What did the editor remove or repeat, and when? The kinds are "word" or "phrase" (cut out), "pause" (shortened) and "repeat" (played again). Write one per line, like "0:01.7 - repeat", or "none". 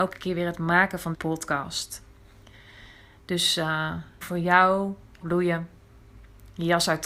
0:01.1 - word
0:04.2 - word
0:05.2 - word